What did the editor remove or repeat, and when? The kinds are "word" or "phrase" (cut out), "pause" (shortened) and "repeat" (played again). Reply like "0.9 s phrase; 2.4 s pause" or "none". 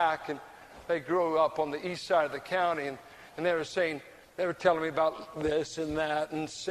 none